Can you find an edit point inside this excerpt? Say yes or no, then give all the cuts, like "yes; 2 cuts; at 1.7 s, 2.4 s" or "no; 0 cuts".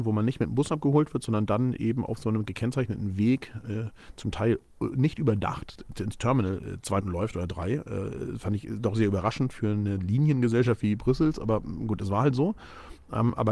yes; 1 cut; at 7.0 s